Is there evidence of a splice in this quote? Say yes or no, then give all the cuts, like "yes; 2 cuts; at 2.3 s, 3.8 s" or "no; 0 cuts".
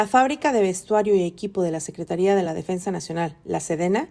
no; 0 cuts